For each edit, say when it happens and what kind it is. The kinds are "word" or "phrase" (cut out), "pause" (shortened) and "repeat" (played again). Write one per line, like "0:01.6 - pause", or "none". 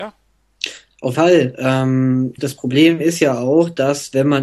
0:01.1 - word
0:02.4 - word